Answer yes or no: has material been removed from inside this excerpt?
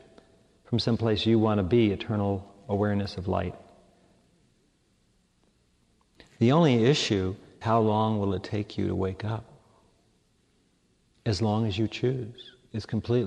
yes